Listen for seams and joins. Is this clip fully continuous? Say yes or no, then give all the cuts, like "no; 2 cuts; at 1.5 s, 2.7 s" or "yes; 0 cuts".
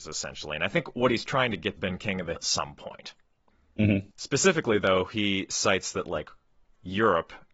no; 3 cuts; at 1.8 s, 2.4 s, 4.1 s